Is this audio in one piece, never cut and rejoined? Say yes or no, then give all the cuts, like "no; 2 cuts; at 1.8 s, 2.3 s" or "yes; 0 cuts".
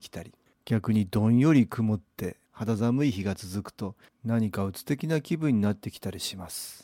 yes; 0 cuts